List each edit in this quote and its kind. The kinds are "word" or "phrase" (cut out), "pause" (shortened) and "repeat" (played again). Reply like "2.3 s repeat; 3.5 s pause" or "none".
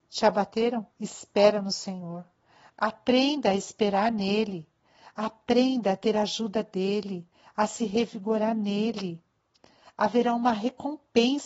0.9 s pause

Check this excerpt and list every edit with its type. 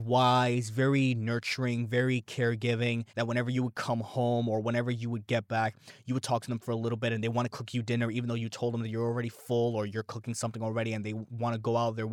3.1 s pause

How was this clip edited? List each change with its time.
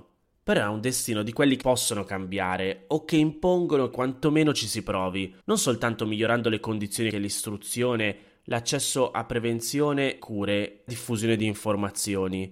1.6 s word; 3.9 s word; 5.4 s pause; 7.1 s word; 10.2 s word; 10.9 s word

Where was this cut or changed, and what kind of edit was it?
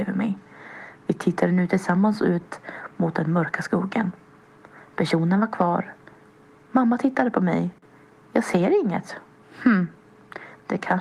none

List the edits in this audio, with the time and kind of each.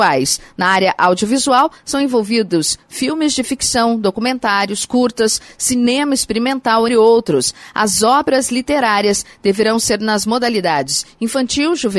6.9 s word

